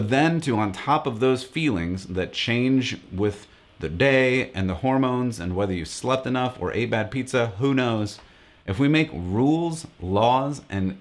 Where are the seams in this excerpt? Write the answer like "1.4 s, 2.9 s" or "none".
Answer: none